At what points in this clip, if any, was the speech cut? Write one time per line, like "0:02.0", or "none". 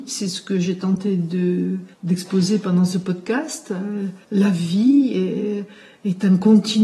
0:01.9
0:04.2